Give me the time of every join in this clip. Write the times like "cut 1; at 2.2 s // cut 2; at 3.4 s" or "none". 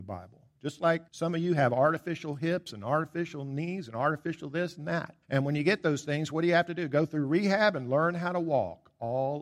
cut 1; at 1.1 s // cut 2; at 5.2 s